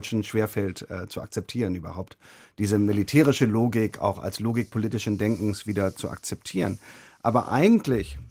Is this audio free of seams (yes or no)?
yes